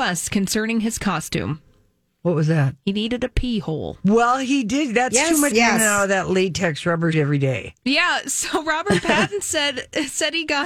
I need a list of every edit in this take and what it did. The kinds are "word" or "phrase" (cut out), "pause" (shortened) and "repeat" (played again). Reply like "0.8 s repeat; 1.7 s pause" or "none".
5.5 s phrase; 7.1 s word